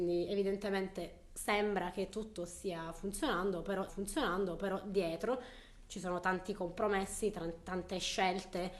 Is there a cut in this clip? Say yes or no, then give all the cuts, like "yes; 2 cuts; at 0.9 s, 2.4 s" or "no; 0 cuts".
yes; 1 cut; at 3.9 s